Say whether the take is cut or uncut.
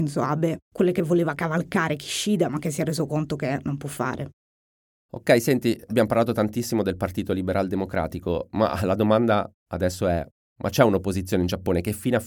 uncut